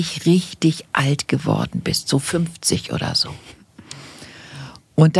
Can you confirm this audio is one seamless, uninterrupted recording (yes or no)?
yes